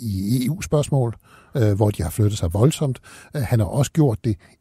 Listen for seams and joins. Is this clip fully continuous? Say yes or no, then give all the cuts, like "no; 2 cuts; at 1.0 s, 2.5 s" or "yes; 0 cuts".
yes; 0 cuts